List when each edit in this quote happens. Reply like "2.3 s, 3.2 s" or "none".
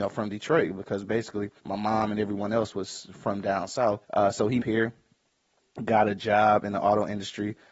1.6 s, 4.0 s, 4.6 s